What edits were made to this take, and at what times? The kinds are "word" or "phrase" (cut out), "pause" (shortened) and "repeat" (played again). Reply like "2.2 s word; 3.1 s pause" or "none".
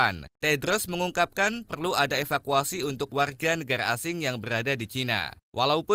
1.7 s word